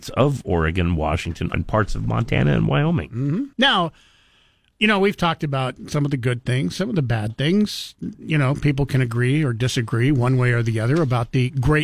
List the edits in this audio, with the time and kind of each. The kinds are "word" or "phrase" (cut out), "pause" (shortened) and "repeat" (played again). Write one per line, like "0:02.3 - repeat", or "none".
0:01.5 - word
0:03.5 - pause